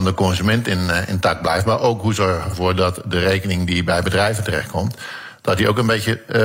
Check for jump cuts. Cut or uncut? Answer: uncut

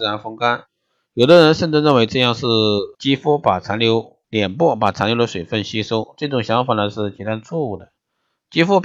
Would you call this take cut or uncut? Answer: cut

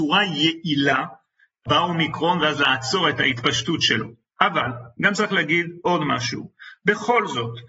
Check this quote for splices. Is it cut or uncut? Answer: uncut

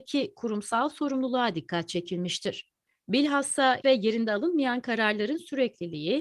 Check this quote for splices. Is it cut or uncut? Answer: cut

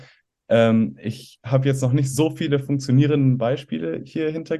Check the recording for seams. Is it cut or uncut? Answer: uncut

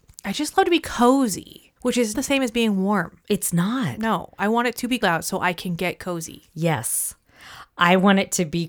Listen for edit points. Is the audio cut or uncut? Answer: cut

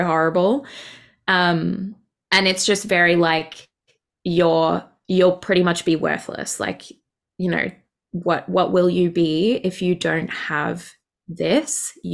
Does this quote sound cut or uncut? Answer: uncut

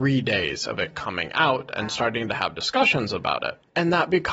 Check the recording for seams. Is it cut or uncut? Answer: uncut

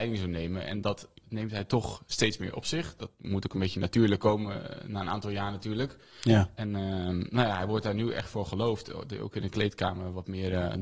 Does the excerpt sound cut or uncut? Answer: uncut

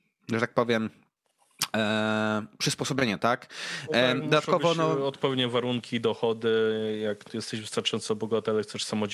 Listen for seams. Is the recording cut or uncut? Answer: cut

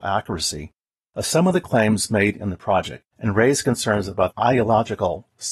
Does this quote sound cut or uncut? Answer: cut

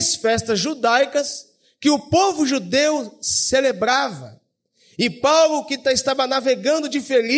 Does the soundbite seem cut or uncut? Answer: uncut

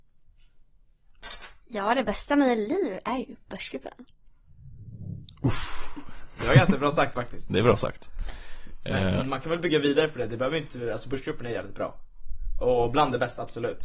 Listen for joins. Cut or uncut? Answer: uncut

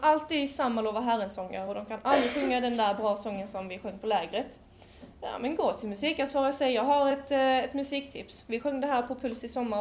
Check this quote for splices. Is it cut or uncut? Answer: uncut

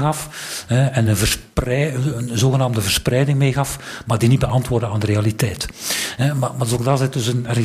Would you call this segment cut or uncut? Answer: uncut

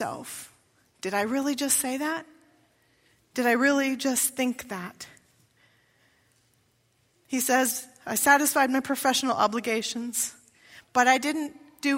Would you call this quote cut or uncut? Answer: uncut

